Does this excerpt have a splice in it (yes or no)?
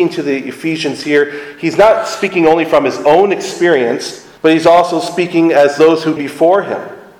yes